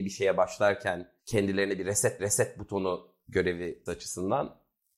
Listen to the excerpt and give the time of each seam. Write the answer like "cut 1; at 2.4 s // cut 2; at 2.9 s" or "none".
cut 1; at 1.2 s // cut 2; at 2.2 s // cut 3; at 3.9 s